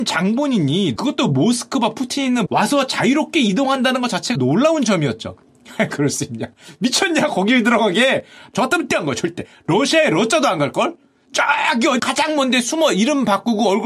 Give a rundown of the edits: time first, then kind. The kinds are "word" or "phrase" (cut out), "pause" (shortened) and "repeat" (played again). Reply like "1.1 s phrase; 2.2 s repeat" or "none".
1.0 s word; 2.5 s word; 4.3 s word; 5.9 s word; 8.9 s word; 12.0 s word